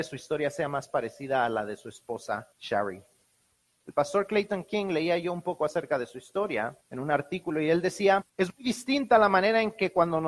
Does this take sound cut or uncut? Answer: cut